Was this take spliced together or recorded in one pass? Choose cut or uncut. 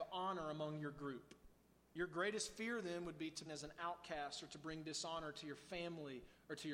cut